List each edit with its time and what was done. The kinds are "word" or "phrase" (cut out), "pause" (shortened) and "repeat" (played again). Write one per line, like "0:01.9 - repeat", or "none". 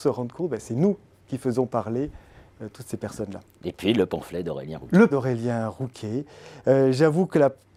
0:05.1 - word